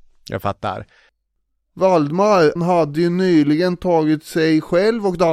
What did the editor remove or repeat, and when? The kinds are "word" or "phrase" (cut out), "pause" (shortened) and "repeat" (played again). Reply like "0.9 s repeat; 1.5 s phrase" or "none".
2.6 s word